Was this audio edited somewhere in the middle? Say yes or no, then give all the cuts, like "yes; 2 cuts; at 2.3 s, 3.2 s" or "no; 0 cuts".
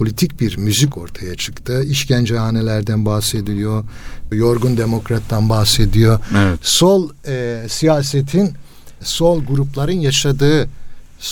yes; 2 cuts; at 0.9 s, 4.3 s